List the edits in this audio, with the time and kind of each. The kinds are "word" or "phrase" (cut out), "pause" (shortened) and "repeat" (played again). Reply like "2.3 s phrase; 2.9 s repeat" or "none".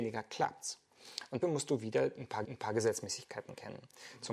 1.4 s word; 2.4 s repeat